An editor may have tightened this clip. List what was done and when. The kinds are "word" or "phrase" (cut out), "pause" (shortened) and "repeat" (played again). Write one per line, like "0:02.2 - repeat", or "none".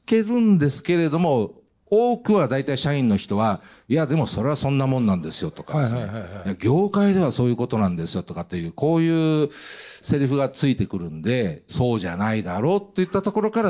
0:11.7 - word